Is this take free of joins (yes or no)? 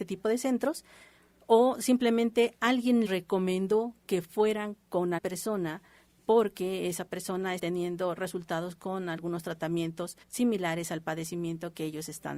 no